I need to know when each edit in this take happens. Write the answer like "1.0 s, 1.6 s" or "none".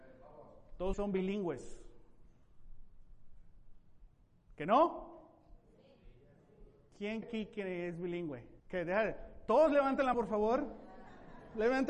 0.9 s, 7.2 s, 8.6 s, 10.1 s